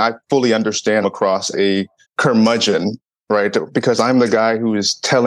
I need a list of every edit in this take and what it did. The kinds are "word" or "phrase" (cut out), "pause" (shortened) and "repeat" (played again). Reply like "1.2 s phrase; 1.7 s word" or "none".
1.0 s phrase; 1.5 s word; 2.0 s pause